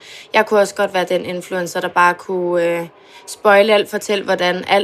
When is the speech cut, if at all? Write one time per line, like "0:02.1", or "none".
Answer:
none